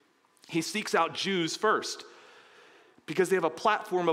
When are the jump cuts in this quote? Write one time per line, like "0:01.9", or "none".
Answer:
none